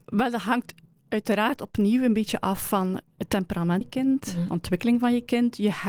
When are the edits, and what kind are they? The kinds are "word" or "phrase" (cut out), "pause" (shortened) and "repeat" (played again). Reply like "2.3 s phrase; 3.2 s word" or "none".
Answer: 3.8 s word